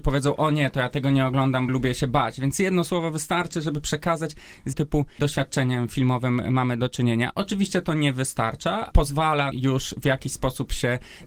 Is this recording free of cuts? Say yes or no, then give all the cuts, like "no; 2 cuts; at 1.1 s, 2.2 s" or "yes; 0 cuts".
no; 4 cuts; at 1.7 s, 4.7 s, 8.9 s, 9.5 s